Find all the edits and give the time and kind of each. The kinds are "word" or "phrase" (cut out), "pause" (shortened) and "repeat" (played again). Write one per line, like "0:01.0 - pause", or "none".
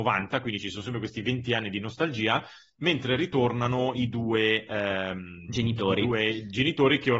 none